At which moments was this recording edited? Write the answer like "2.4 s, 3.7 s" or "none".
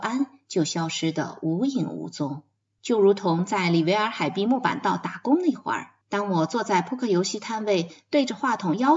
2.6 s, 6.0 s